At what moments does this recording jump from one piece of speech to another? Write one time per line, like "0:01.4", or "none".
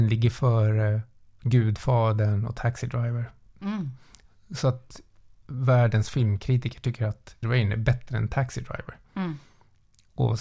0:07.4